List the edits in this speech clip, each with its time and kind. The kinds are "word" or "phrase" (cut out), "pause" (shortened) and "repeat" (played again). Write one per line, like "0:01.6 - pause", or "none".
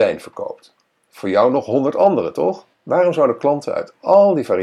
0:02.7 - pause